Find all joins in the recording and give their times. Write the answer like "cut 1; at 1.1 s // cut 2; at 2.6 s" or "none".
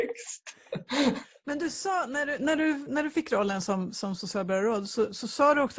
none